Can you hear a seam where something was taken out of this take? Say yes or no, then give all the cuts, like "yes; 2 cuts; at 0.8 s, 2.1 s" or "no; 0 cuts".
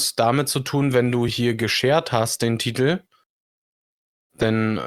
no; 0 cuts